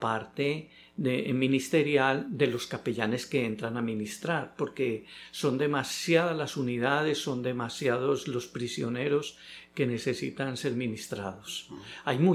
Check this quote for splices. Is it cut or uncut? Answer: uncut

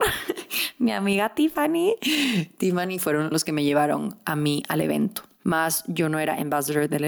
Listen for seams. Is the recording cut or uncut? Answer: uncut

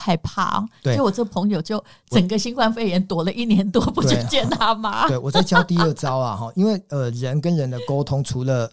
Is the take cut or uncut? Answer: uncut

